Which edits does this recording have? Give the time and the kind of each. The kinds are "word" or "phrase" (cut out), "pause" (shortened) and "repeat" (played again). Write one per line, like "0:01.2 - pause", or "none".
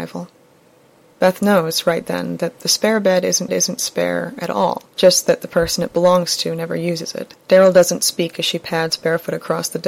0:03.5 - repeat
0:04.9 - pause
0:07.4 - pause